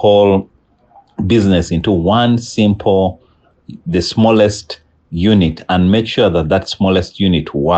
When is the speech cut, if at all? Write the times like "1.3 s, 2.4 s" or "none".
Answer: none